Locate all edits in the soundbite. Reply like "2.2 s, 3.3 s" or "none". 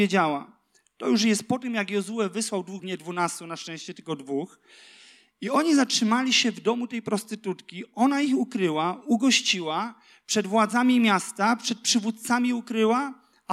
2.8 s